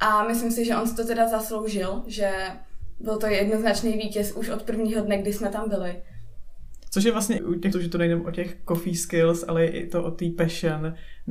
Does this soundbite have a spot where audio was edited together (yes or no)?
yes